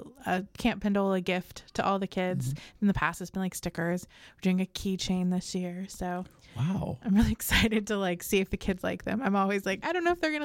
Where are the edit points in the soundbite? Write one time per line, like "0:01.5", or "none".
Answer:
none